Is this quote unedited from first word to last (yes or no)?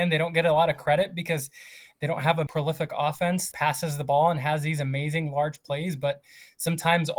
no